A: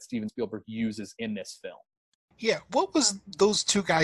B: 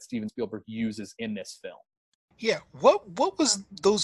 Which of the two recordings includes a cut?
A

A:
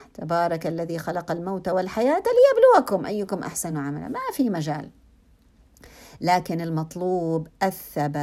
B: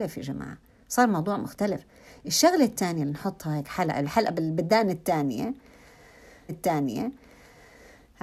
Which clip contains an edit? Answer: B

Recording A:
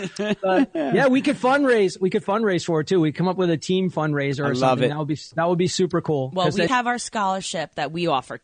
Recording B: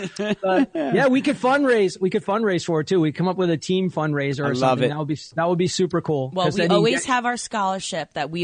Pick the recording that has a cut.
A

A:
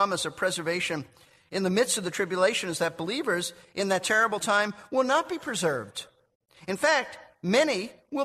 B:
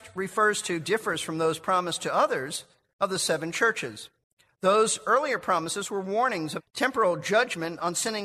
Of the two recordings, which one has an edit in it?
B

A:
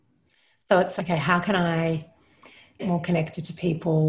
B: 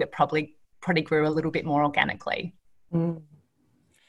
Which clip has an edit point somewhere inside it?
A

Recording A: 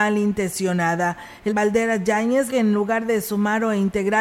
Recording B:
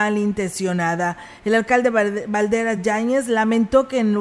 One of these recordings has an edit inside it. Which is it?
A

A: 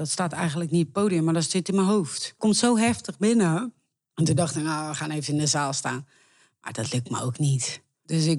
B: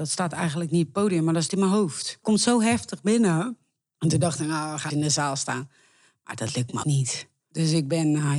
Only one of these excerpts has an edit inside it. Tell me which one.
B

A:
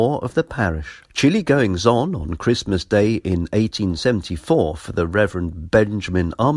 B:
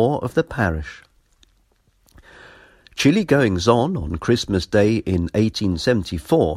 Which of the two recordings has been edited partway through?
A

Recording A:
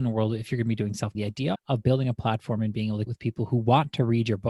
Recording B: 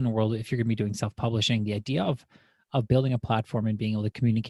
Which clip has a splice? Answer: A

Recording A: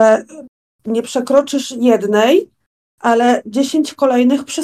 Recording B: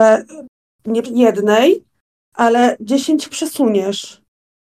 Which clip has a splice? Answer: B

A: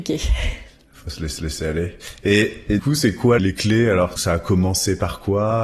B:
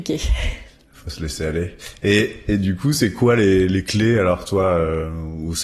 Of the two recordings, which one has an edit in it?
A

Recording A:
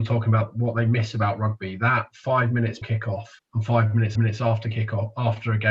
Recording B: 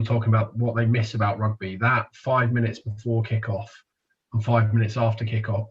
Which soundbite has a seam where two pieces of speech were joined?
A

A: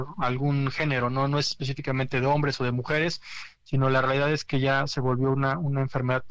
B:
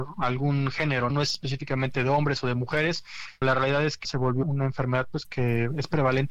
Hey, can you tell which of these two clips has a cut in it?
B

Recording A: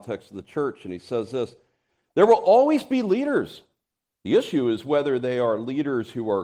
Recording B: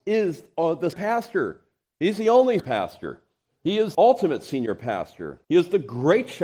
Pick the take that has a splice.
B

